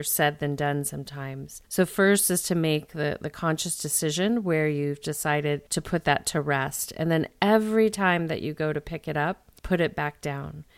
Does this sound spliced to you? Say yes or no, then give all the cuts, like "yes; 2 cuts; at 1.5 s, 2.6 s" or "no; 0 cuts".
yes; 3 cuts; at 1.6 s, 5.7 s, 9.6 s